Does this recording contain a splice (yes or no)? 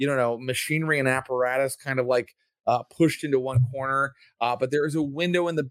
no